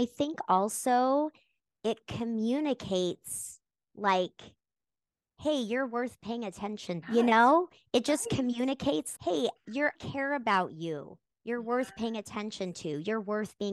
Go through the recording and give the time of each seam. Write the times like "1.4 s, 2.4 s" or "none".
7.0 s, 9.1 s, 9.9 s